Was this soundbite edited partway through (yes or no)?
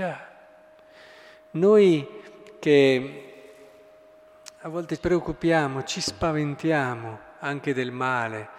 yes